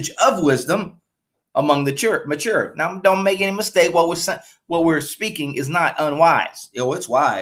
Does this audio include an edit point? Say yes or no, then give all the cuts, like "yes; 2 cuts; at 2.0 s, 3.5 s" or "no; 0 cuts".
no; 0 cuts